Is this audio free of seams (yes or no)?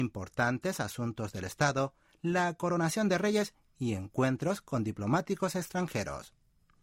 yes